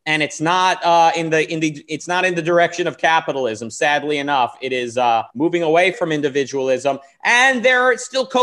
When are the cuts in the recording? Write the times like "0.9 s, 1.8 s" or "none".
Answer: 5.3 s, 5.9 s